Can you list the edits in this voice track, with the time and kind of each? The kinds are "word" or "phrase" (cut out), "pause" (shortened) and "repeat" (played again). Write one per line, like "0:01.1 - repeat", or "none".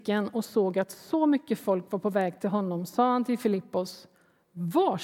none